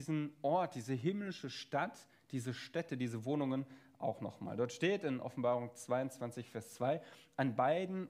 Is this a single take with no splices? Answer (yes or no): yes